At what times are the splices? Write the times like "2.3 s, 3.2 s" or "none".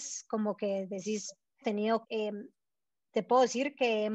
1.6 s, 2.0 s